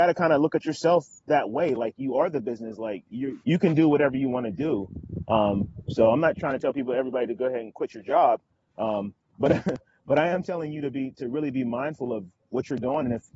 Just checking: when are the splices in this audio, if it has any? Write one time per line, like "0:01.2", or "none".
0:03.4
0:11.1